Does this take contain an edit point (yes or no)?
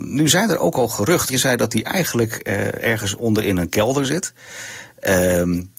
yes